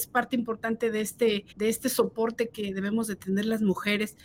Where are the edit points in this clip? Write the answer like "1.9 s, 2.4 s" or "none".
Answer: 1.5 s